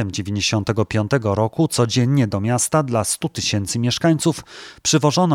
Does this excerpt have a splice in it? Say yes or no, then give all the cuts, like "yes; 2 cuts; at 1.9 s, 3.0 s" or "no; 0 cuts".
no; 0 cuts